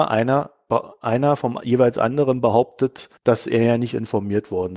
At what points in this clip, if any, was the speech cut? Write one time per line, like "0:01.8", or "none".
0:03.2